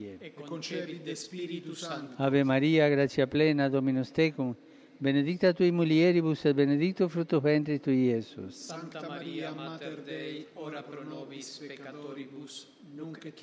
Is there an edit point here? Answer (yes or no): no